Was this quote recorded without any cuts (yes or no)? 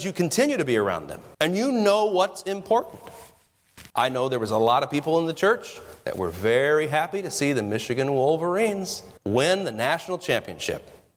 no